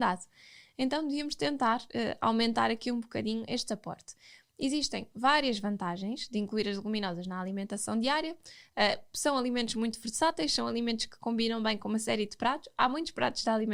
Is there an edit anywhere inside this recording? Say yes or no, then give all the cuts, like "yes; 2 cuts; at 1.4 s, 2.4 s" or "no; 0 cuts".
no; 0 cuts